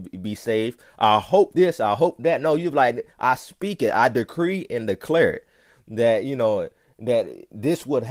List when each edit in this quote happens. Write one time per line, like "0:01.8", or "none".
none

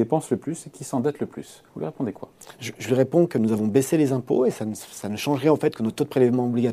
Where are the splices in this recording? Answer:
0:01.7

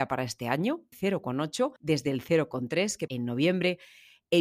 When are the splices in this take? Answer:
0:00.9
0:01.8
0:03.1

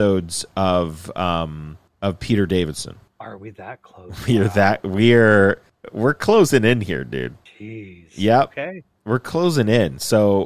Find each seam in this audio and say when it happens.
0:03.1

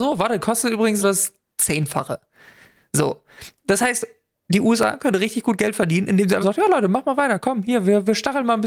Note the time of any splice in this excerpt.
0:01.0
0:06.4

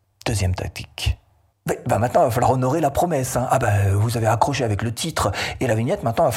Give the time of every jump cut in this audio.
none

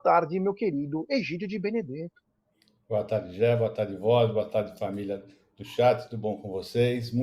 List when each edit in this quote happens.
none

